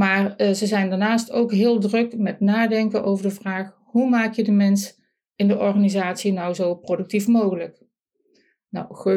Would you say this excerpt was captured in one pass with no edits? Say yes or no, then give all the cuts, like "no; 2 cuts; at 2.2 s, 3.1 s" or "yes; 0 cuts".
yes; 0 cuts